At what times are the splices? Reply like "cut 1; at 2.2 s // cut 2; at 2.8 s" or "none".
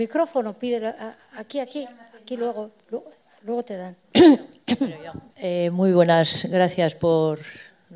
cut 1; at 4.0 s // cut 2; at 5.3 s